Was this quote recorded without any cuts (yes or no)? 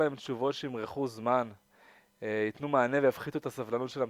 yes